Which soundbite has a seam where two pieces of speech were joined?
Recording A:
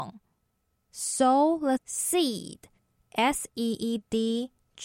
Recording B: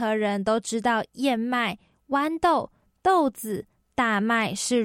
A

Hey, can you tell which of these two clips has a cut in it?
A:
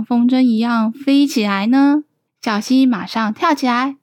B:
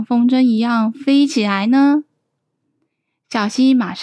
A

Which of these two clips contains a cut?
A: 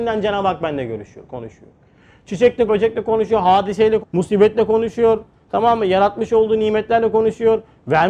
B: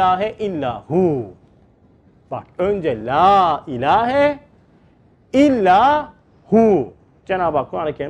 A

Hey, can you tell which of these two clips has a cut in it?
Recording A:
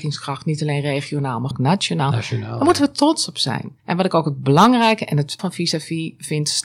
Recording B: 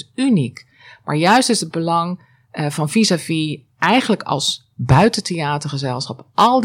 A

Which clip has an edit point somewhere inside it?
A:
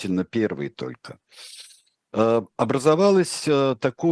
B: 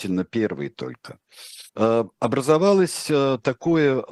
B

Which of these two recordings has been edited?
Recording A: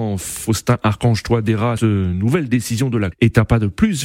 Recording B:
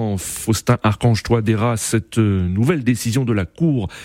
A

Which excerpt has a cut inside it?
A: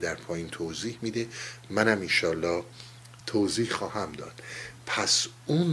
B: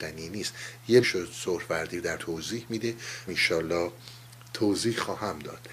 B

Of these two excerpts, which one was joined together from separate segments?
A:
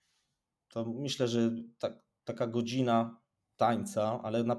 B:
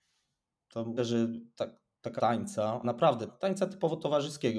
B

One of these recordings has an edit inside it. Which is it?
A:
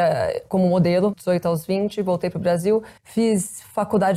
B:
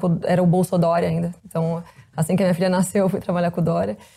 A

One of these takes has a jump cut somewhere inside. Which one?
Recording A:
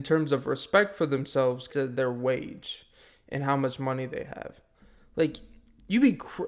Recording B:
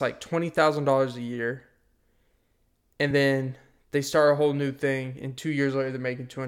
A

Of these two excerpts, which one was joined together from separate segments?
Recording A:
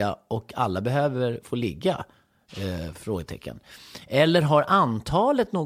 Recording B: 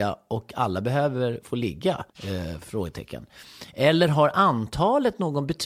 B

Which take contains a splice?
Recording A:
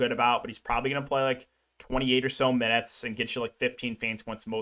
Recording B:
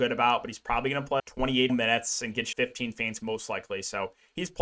B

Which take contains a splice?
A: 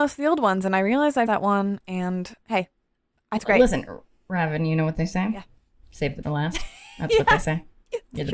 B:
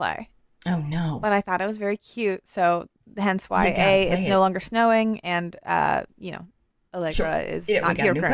A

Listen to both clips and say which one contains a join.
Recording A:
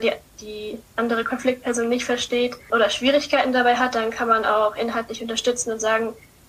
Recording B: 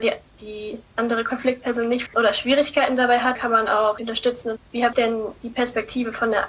B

